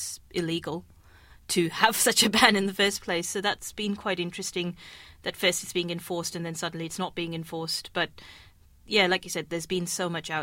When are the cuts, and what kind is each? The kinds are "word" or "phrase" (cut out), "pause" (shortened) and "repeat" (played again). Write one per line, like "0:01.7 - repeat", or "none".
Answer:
none